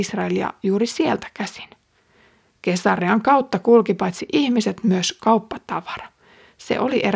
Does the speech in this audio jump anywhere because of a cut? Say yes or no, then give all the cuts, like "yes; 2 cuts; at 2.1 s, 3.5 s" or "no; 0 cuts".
no; 0 cuts